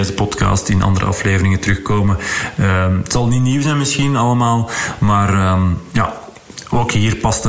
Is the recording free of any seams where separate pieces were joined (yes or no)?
yes